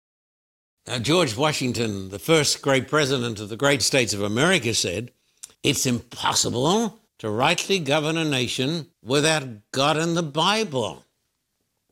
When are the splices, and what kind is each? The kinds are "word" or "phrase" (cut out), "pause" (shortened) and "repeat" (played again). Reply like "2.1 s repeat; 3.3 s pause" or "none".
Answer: 3.8 s word; 5.5 s pause; 7.1 s pause; 8.9 s pause